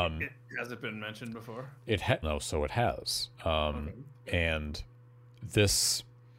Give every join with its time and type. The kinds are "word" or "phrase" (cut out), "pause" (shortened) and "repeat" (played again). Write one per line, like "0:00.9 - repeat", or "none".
0:01.8 - pause
0:02.2 - word
0:03.3 - pause